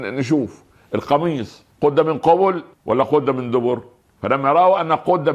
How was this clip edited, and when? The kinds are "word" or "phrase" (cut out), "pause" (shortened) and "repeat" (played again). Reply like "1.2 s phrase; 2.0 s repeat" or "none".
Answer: 1.7 s pause; 2.7 s pause; 4.0 s pause